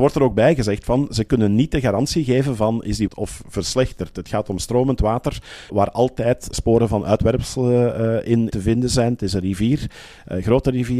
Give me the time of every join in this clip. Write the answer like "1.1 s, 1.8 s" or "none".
3.1 s, 5.7 s, 6.5 s, 8.5 s